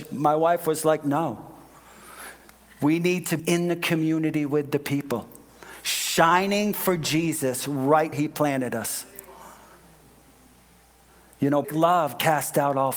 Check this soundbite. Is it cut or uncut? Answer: cut